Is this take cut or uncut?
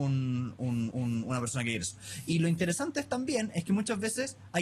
cut